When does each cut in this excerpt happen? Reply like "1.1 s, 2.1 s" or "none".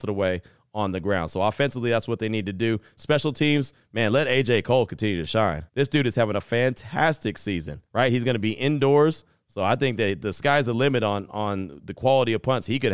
5.7 s, 7.9 s